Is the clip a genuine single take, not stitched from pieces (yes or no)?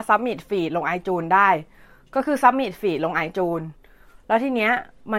yes